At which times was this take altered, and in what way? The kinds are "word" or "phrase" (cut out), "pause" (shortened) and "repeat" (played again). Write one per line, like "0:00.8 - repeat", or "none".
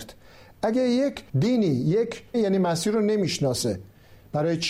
0:01.3 - pause
0:02.3 - phrase